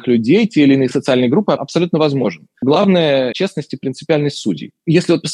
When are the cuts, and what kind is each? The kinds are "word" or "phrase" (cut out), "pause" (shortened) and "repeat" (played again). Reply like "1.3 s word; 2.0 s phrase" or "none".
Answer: 3.3 s word